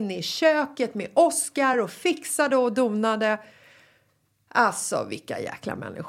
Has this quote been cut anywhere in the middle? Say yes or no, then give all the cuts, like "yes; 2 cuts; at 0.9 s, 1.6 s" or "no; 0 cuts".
no; 0 cuts